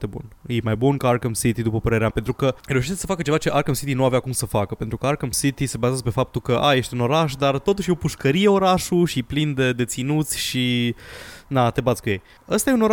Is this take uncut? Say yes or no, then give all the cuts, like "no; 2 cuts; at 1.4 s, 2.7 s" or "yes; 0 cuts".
no; 2 cuts; at 2.1 s, 2.6 s